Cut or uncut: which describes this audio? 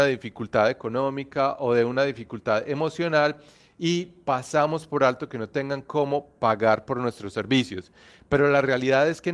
uncut